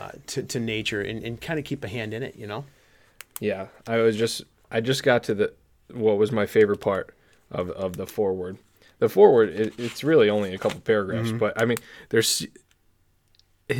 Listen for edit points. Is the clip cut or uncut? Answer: uncut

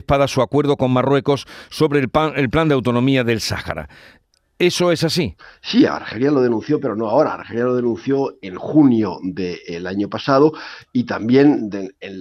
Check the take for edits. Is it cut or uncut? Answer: uncut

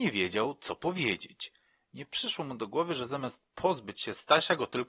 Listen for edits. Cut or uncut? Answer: uncut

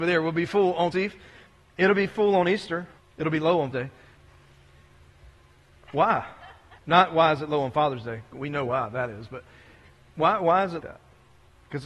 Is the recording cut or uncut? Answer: cut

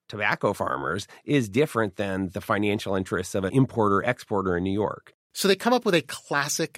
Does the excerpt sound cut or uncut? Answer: uncut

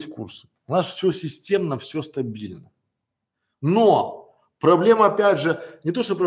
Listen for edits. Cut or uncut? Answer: uncut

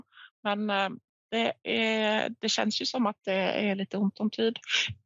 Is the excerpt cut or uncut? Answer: uncut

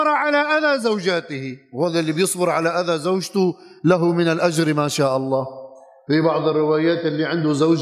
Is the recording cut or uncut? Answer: uncut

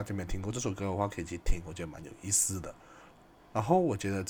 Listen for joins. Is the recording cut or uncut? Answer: uncut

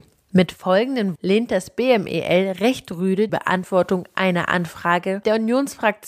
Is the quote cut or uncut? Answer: cut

